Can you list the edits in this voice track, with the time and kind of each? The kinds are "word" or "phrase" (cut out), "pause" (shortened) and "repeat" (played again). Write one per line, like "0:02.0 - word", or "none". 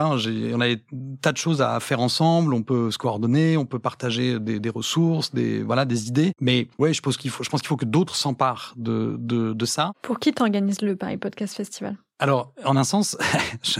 0:06.7 - pause